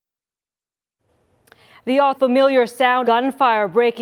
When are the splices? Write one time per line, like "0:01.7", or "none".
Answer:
0:02.1
0:03.0